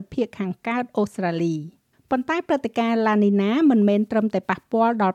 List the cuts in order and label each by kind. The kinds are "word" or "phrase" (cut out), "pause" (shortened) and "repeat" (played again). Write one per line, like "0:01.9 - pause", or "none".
0:01.9 - pause